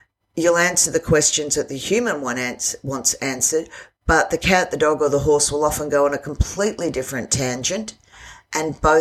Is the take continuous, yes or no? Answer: yes